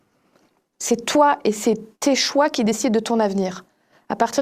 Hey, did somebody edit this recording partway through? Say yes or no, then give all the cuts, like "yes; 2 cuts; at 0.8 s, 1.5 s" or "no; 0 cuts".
yes; 1 cut; at 1.9 s